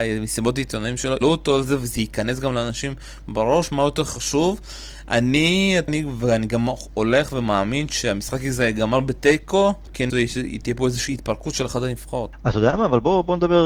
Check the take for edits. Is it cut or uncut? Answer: cut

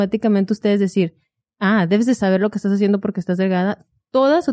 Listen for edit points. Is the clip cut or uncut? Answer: uncut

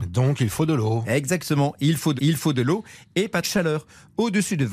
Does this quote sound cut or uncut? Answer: cut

